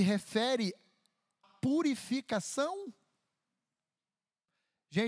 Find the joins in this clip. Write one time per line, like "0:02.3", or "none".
0:01.4